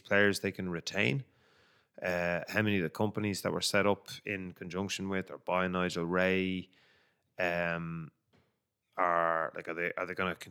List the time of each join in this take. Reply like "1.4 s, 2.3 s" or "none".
none

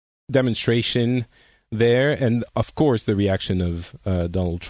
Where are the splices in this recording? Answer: 2.5 s

